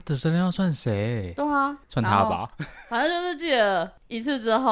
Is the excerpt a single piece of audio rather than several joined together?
no; 1 cut; at 1.8 s

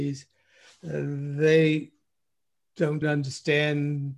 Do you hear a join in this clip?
yes; 1 cut; at 3.0 s

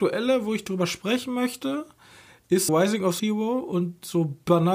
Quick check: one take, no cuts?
no; 2 cuts; at 2.7 s, 3.2 s

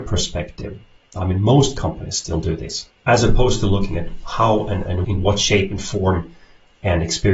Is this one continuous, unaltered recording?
no; 1 cut; at 3.0 s

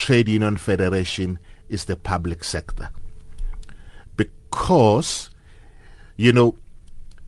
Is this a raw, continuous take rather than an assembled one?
yes; 0 cuts

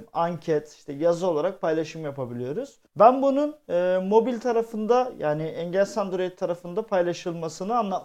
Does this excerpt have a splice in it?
yes; 1 cut; at 2.9 s

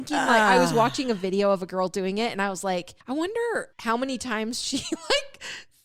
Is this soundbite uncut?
no; 2 cuts; at 3.0 s, 3.7 s

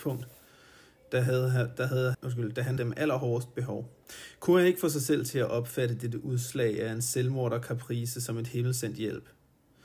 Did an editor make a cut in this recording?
yes; 2 cuts; at 2.1 s, 2.8 s

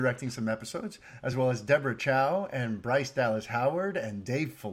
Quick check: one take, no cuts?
yes; 0 cuts

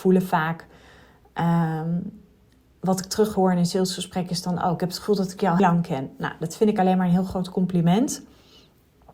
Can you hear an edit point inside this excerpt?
yes; 1 cut; at 5.6 s

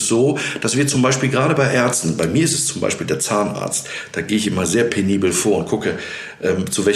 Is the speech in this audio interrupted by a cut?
no; 0 cuts

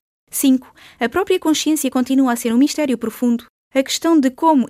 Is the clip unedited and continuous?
yes; 0 cuts

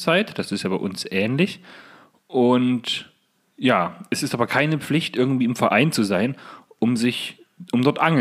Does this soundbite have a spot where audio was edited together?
no; 0 cuts

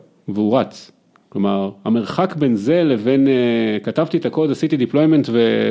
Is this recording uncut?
yes; 0 cuts

